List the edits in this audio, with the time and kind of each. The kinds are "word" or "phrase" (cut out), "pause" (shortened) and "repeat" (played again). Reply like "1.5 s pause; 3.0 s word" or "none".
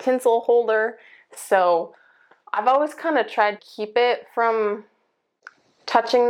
3.6 s word